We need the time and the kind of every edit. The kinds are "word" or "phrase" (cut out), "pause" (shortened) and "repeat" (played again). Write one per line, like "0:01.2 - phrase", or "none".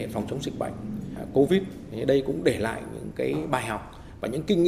none

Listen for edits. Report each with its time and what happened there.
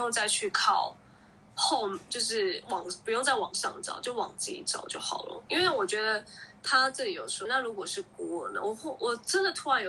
0:07.5 - word

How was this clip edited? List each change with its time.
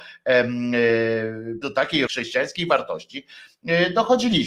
0:01.6 - word
0:02.1 - phrase

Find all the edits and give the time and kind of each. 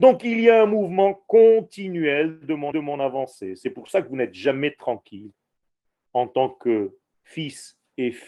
0:02.7 - repeat

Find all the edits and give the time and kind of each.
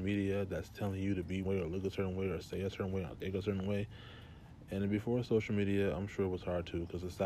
0:01.4 - word

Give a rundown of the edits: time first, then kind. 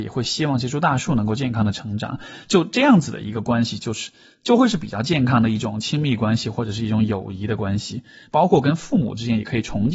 none

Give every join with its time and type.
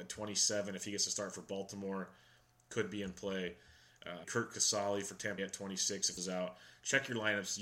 0:04.2 - word
0:05.4 - word
0:06.2 - word

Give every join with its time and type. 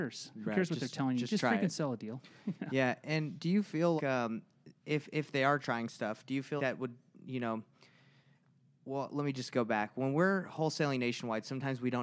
0:04.0 - word
0:05.6 - word
0:06.6 - word

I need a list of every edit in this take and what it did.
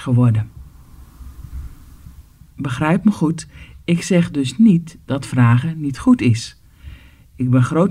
none

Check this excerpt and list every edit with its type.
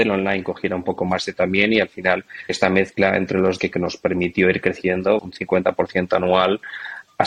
0:01.3 - word
0:02.5 - word
0:03.6 - word
0:05.2 - word

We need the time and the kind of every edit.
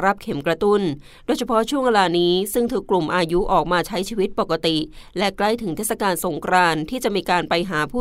none

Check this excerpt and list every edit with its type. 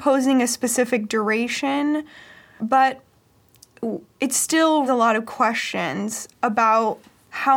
0:02.6 - word
0:04.9 - word
0:06.3 - word

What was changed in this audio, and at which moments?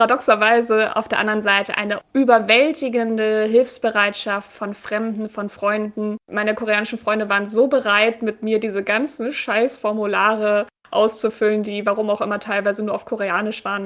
0:06.2 - pause

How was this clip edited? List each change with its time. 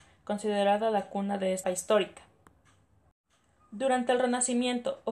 0:01.6 - word

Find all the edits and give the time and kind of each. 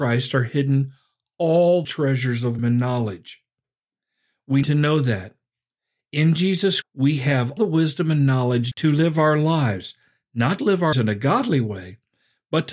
0:01.8 - word
0:02.6 - word
0:04.6 - word
0:06.8 - word
0:07.6 - word
0:08.7 - word
0:10.6 - word
0:10.9 - word

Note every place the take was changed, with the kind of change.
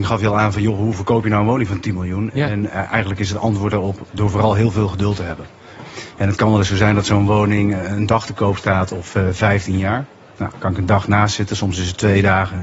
none

